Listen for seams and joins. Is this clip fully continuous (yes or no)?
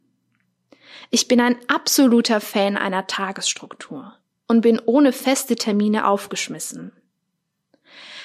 yes